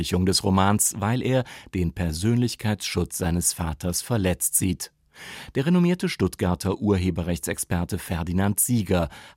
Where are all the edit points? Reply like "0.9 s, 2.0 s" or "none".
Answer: none